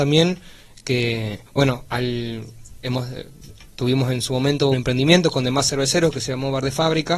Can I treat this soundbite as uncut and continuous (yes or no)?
no